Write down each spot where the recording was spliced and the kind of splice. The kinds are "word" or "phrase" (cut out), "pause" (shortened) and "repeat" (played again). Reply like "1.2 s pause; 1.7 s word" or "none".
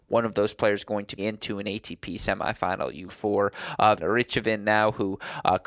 1.2 s word; 3.1 s word; 4.0 s word